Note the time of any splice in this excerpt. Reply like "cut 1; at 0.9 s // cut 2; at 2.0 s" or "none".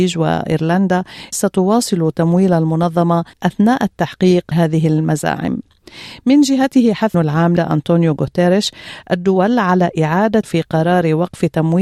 cut 1; at 1.3 s // cut 2; at 3.3 s // cut 3; at 4.5 s // cut 4; at 7.1 s // cut 5; at 7.6 s // cut 6; at 10.4 s